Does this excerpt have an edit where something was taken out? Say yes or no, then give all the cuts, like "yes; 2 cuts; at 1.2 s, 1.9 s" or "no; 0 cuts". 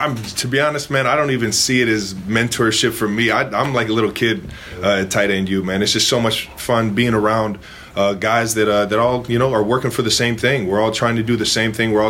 no; 0 cuts